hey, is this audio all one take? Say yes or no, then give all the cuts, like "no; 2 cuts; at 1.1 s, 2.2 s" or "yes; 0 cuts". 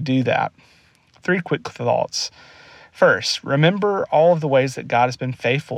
yes; 0 cuts